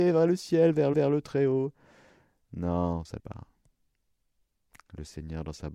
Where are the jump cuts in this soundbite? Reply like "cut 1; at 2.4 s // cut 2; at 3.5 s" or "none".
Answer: cut 1; at 0.9 s // cut 2; at 3.2 s